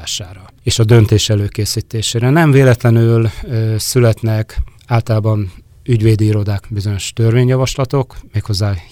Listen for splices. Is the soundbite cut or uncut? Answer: cut